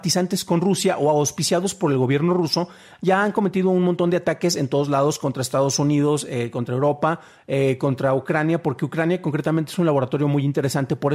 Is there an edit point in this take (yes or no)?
no